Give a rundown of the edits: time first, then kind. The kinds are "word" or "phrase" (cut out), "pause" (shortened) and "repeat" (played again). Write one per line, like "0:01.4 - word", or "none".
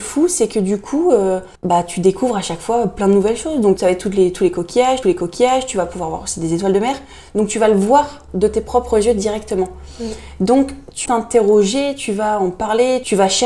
0:01.5 - pause
0:03.8 - word
0:05.0 - repeat
0:11.1 - word

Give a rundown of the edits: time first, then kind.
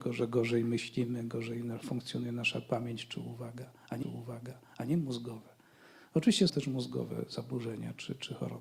0:04.0 - repeat
0:06.5 - word

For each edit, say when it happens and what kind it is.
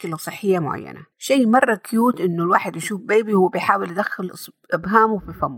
0:01.1 - pause

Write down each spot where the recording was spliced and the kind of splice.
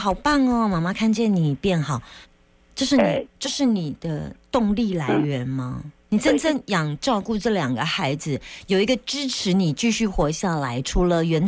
0:02.2 - pause
0:03.3 - pause
0:06.0 - pause

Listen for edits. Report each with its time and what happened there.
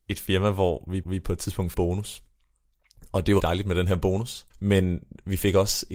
0:01.0 - repeat
0:01.7 - phrase
0:03.4 - word
0:04.5 - pause

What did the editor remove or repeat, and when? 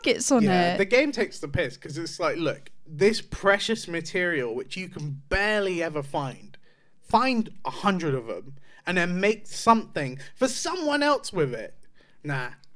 none

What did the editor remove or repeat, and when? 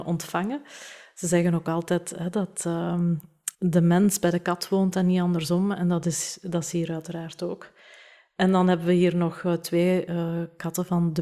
0:03.5 - pause

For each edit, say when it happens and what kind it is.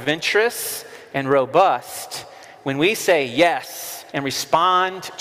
0:04.1 - pause

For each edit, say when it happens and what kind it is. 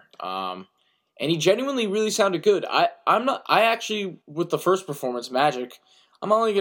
0:04.2 - pause

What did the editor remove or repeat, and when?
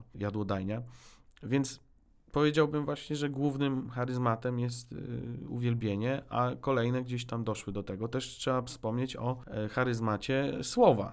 none

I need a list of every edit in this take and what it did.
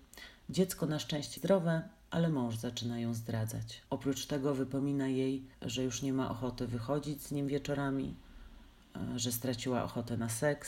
0:01.4 - word
0:03.9 - pause
0:05.5 - pause

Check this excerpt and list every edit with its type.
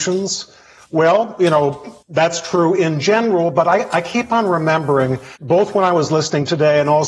0:02.0 - pause
0:05.4 - pause

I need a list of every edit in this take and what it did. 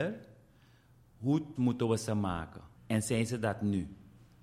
0:01.6 - word
0:02.8 - pause

